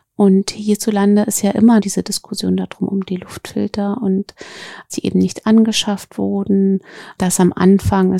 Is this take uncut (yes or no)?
no